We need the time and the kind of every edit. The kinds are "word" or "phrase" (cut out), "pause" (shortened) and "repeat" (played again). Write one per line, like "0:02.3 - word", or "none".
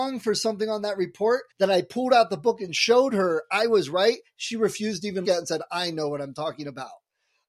0:01.5 - pause
0:05.2 - word